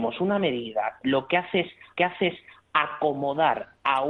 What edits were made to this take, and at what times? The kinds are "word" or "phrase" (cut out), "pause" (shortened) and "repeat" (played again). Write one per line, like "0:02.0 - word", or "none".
0:01.0 - word
0:02.0 - repeat

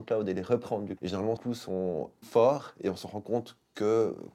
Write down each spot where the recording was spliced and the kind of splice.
0:01.0 - word
0:01.4 - word
0:02.2 - word

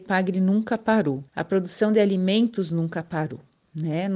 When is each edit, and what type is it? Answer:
0:01.3 - pause

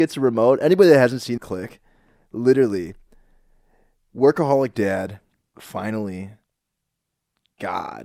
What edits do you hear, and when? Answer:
0:01.4 - phrase
0:05.3 - pause

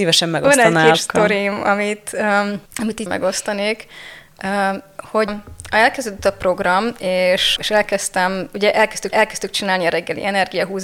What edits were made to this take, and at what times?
0:00.9 - word
0:02.7 - pause
0:03.1 - word
0:05.3 - word
0:07.6 - word
0:09.1 - repeat

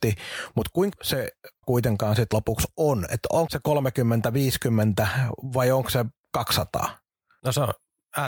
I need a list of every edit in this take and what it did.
0:00.9 - word
0:01.6 - word
0:02.3 - word
0:03.5 - word

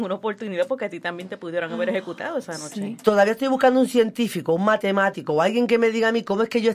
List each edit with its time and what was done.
none

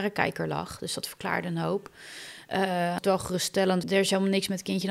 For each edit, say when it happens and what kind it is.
0:03.0 - phrase
0:03.8 - word

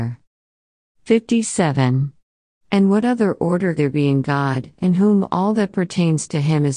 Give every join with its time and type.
0:03.8 - word

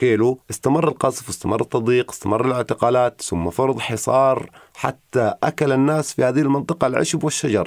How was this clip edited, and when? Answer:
none

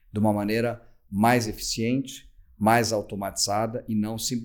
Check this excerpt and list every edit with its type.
none

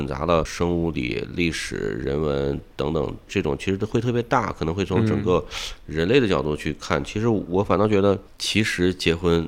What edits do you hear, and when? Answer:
0:00.9 - phrase

